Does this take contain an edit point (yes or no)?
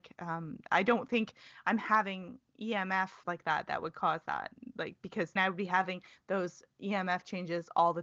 yes